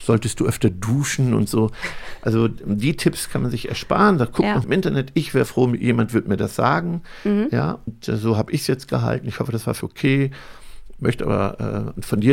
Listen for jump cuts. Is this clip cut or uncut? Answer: cut